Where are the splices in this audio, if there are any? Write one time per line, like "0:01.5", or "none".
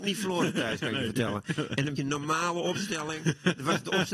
0:02.0